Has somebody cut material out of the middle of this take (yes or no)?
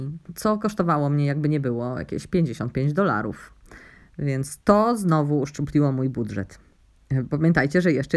no